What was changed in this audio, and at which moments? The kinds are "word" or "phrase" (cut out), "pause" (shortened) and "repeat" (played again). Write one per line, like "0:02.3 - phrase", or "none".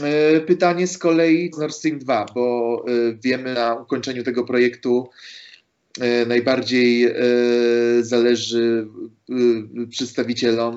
0:01.5 - word
0:03.5 - word